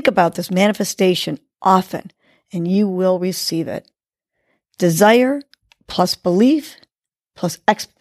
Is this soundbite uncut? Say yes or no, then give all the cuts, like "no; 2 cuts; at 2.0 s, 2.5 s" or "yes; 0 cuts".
yes; 0 cuts